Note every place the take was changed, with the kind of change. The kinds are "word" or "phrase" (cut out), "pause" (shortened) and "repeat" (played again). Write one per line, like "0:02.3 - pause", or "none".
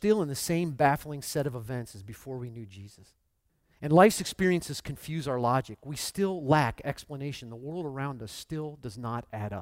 0:03.5 - pause